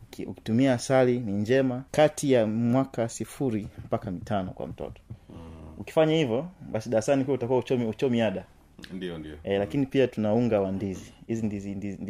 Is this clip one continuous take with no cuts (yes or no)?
no